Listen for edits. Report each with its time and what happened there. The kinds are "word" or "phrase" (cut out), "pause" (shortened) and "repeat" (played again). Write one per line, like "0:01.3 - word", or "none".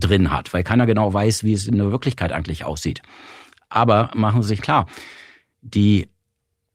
0:04.6 - word